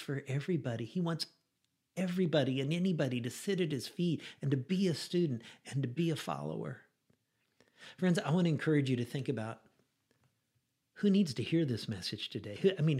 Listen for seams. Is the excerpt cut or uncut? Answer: uncut